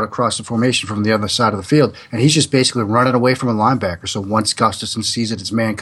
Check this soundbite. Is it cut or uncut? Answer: uncut